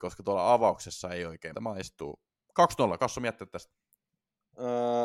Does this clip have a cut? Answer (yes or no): yes